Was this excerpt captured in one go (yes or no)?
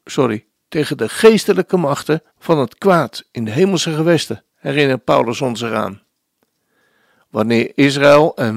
no